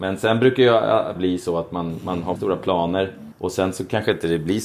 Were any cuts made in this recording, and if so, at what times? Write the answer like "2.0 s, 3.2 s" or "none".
1.2 s, 2.4 s, 3.3 s